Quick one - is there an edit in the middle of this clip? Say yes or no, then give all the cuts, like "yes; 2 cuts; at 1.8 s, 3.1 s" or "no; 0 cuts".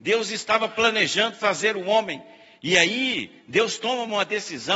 no; 0 cuts